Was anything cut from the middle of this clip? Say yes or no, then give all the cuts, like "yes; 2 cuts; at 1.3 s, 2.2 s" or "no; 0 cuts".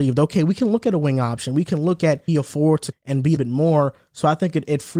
yes; 3 cuts; at 2.3 s, 2.9 s, 3.4 s